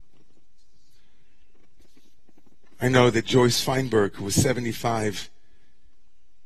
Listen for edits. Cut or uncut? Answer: uncut